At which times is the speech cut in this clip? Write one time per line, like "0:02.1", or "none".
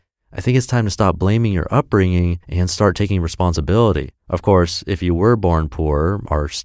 0:02.4
0:04.2